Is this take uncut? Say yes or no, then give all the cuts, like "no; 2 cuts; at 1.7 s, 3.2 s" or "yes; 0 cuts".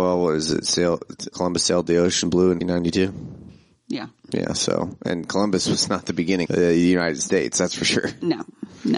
no; 3 cuts; at 1.3 s, 2.6 s, 6.5 s